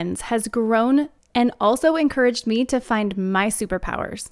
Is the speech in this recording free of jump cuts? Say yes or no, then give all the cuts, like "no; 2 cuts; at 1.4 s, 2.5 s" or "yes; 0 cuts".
yes; 0 cuts